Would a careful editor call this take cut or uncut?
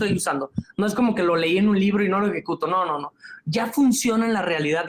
uncut